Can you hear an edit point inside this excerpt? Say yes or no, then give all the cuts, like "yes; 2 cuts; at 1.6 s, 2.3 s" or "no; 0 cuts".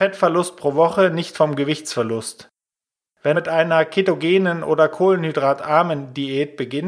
yes; 1 cut; at 3.3 s